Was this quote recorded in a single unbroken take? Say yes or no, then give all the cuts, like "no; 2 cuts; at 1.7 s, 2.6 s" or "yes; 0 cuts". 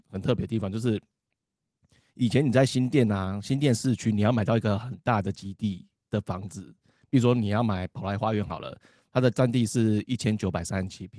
yes; 0 cuts